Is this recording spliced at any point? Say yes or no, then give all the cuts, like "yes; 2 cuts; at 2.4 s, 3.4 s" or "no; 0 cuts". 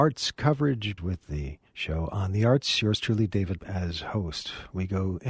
yes; 3 cuts; at 1.0 s, 1.7 s, 3.6 s